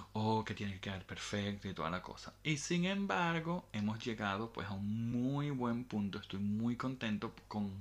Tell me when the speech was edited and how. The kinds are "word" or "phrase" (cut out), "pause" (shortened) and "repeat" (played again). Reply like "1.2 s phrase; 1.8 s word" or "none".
none